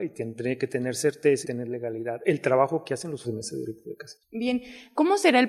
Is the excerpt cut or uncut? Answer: cut